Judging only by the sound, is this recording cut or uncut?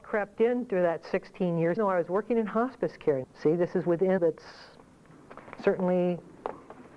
cut